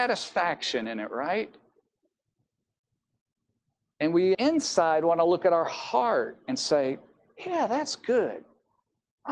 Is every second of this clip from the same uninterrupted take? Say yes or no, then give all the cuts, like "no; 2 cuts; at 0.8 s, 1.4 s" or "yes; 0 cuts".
no; 1 cut; at 4.3 s